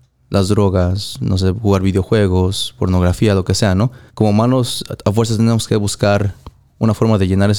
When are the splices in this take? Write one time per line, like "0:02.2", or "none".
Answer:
0:04.1